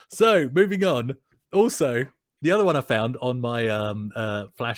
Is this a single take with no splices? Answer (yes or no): yes